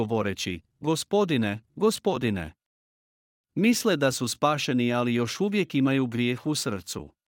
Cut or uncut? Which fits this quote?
uncut